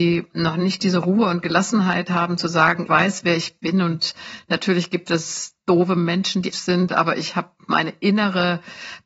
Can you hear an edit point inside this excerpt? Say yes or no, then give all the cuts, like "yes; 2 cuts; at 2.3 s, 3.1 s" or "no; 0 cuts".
yes; 2 cuts; at 2.9 s, 6.5 s